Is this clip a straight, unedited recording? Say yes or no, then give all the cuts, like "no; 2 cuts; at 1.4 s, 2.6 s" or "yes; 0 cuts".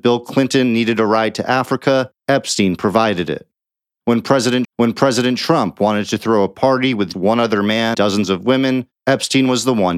no; 5 cuts; at 2.2 s, 4.6 s, 7.1 s, 7.9 s, 9.0 s